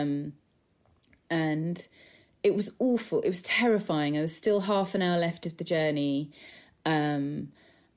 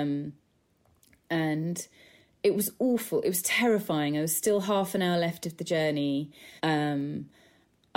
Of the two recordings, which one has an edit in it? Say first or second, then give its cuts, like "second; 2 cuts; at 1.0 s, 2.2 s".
second; 1 cut; at 6.6 s